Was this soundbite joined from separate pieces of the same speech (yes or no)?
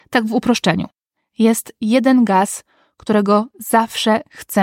no